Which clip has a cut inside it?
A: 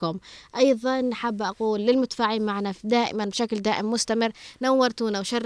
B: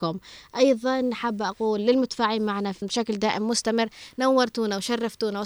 B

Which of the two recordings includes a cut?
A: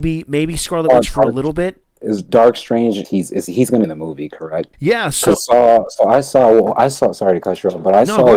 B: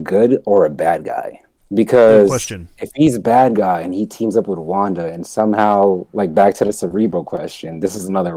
A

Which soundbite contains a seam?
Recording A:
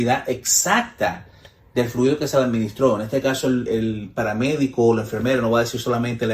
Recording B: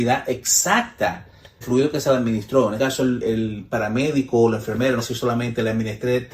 B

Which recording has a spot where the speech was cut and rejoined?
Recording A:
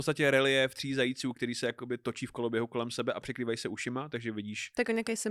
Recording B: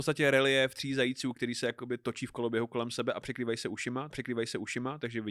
B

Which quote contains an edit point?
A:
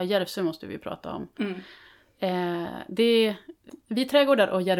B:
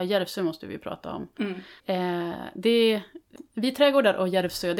B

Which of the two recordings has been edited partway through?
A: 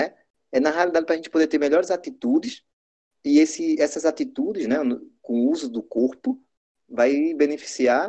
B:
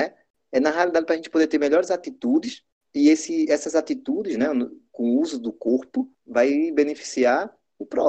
B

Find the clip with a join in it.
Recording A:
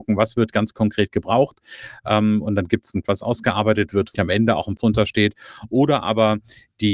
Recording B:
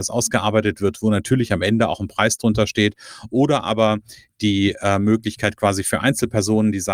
A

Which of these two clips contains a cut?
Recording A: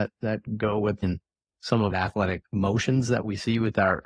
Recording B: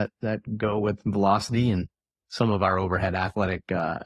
A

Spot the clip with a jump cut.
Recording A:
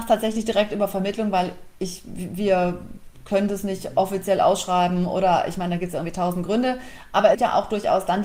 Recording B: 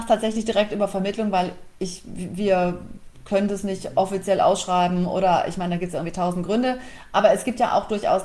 A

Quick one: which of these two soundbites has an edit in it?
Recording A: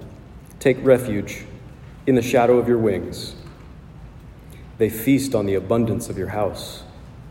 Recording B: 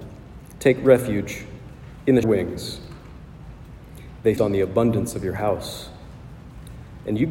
B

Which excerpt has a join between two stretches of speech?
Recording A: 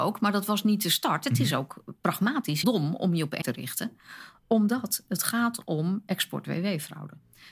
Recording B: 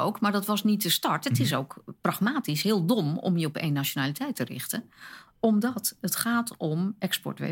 A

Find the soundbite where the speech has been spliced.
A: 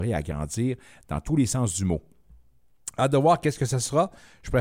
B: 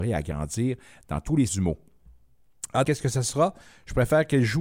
B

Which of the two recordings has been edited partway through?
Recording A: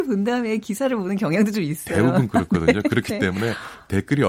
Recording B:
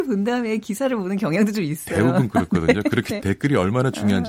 B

